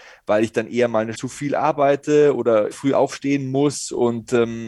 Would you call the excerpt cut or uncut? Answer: cut